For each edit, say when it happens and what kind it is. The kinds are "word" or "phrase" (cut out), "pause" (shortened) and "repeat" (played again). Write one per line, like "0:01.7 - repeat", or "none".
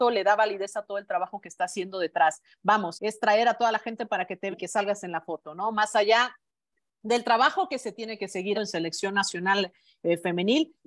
0:02.9 - word
0:04.0 - word
0:04.5 - word
0:08.5 - word